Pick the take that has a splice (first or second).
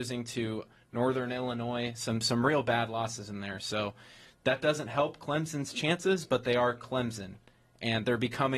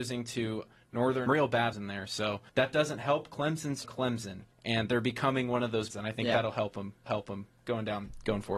second